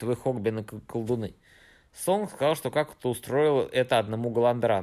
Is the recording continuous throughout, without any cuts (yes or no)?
yes